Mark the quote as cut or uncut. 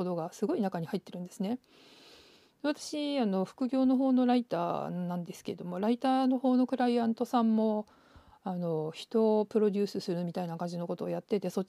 uncut